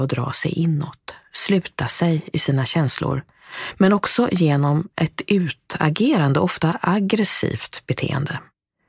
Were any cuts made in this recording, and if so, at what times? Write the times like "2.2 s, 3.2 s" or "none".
none